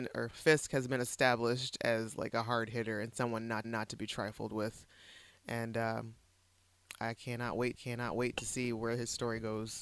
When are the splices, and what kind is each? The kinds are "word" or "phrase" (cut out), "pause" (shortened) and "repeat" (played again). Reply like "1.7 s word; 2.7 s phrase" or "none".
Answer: 3.6 s repeat; 7.7 s repeat